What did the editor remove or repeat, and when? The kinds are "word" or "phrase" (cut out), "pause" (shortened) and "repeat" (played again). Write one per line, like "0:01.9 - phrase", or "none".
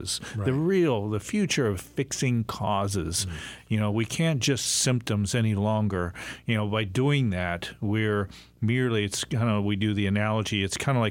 0:01.7 - phrase
0:04.6 - word